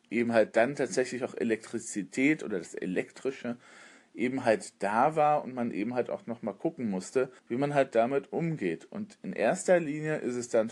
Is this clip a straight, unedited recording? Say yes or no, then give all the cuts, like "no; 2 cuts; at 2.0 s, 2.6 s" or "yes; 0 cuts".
no; 1 cut; at 7.4 s